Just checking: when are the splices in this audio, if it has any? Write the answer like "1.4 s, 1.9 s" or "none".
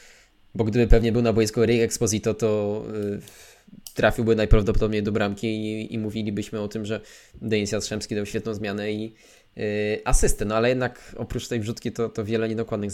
none